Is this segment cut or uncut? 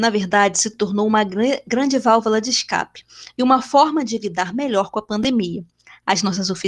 uncut